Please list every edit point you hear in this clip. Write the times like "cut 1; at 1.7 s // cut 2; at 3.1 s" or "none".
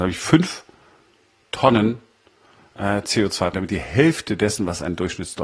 cut 1; at 3.5 s

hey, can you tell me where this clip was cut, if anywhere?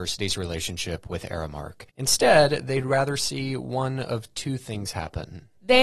cut 1; at 1.9 s

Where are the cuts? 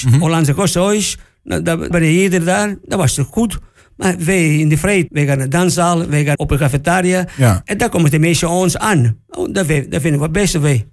cut 1; at 1.9 s // cut 2; at 5.1 s // cut 3; at 6.3 s

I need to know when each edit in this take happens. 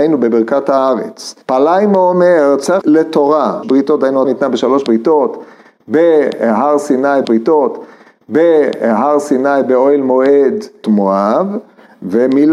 cut 1; at 1.4 s // cut 2; at 2.8 s // cut 3; at 3.6 s // cut 4; at 4.2 s // cut 5; at 7.2 s // cut 6; at 10.8 s

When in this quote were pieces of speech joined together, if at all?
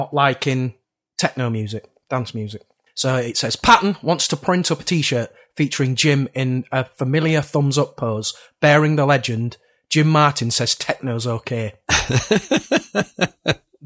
none

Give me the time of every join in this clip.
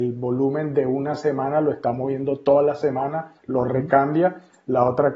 cut 1; at 3.4 s

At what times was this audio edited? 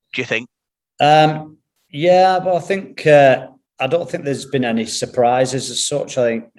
cut 1; at 3.7 s

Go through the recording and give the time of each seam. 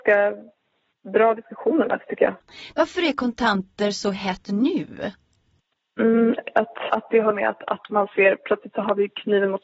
cut 1; at 4.5 s // cut 2; at 6.9 s // cut 3; at 7.3 s

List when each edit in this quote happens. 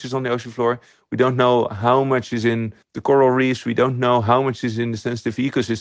cut 1; at 2.8 s

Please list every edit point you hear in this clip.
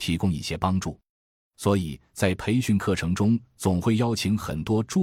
none

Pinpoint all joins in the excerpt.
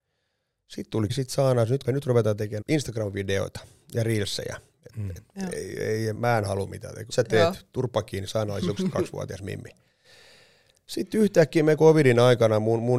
cut 1; at 1.1 s // cut 2; at 1.8 s // cut 3; at 2.6 s // cut 4; at 6.2 s // cut 5; at 7.1 s // cut 6; at 8.8 s // cut 7; at 11.8 s

